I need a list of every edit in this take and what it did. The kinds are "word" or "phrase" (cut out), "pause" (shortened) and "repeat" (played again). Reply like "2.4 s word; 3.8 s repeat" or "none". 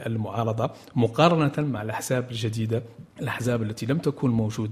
3.1 s pause